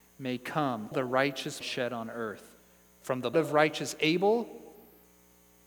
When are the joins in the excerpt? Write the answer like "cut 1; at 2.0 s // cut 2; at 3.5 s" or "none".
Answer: cut 1; at 0.9 s // cut 2; at 1.6 s // cut 3; at 3.3 s

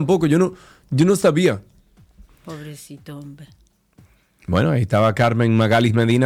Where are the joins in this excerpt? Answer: none

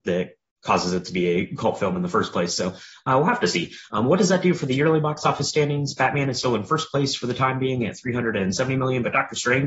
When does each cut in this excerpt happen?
none

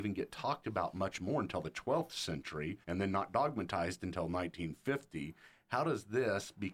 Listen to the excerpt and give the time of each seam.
cut 1; at 2.8 s

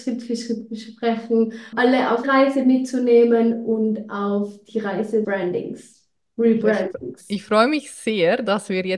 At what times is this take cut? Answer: cut 1; at 1.7 s // cut 2; at 2.2 s // cut 3; at 5.2 s

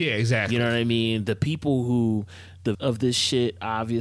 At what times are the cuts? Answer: cut 1; at 2.7 s

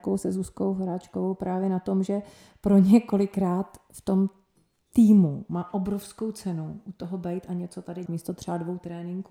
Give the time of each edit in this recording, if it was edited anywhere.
cut 1; at 8.1 s

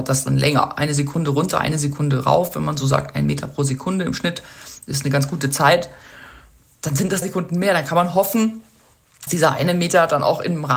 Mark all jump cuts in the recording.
cut 1; at 7.2 s // cut 2; at 9.3 s

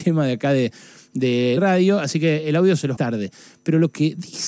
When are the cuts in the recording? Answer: cut 1; at 1.6 s // cut 2; at 3.0 s

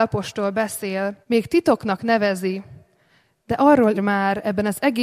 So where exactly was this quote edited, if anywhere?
cut 1; at 1.2 s // cut 2; at 3.9 s

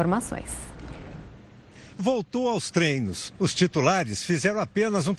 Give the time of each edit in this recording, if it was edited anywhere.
cut 1; at 2.0 s

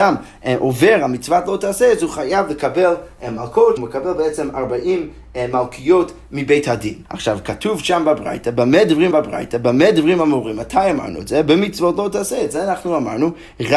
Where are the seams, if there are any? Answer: cut 1; at 3.8 s // cut 2; at 7.1 s // cut 3; at 9.1 s

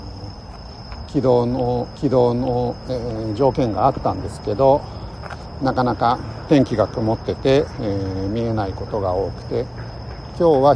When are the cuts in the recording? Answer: cut 1; at 1.9 s

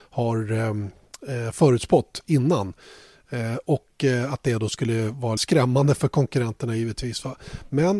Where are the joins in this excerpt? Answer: cut 1; at 5.4 s

